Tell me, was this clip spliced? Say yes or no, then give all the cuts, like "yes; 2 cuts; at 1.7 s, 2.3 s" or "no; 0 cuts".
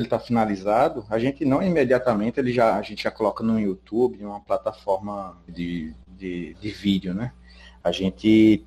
yes; 1 cut; at 5.5 s